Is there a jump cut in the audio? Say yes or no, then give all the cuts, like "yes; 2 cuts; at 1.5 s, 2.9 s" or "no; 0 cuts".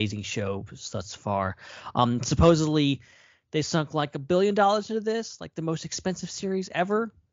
no; 0 cuts